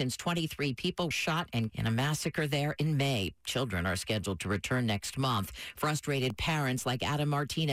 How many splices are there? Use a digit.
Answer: 2